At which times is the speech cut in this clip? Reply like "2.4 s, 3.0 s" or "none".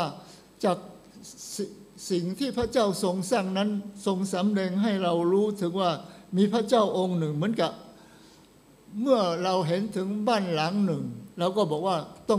11.3 s

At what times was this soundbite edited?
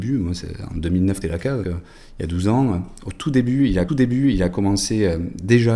1.2 s, 1.6 s, 3.9 s

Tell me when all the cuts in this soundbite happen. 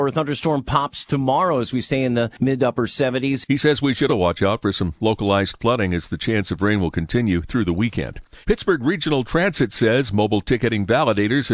4.1 s, 8.4 s

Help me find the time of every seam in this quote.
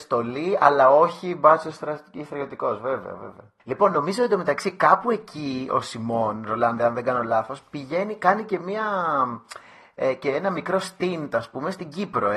3.6 s

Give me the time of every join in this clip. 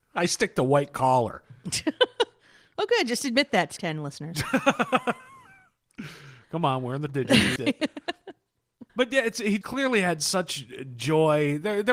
3.8 s, 7.1 s, 7.6 s, 8.9 s, 9.6 s

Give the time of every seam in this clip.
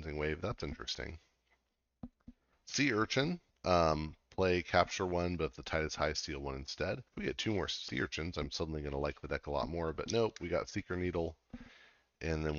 2.5 s, 7.1 s

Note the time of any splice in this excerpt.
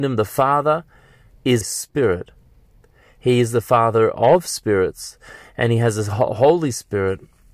1.6 s

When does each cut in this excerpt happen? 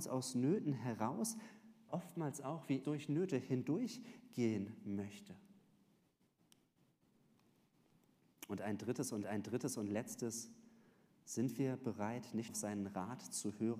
1.9 s, 2.8 s, 9.2 s, 12.5 s

